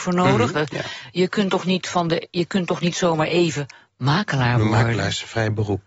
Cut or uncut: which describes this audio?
uncut